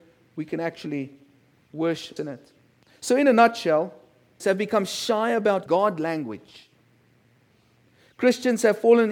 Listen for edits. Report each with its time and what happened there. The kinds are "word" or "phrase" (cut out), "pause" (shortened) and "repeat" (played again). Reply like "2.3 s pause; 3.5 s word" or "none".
2.2 s word; 4.4 s word; 5.7 s word